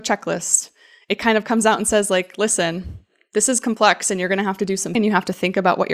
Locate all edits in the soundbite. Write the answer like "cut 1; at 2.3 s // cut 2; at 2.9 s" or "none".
cut 1; at 4.9 s